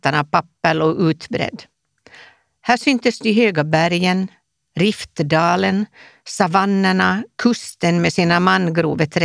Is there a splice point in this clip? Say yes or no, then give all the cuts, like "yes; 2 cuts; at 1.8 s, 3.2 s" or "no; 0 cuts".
no; 0 cuts